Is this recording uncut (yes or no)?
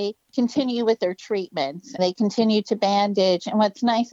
no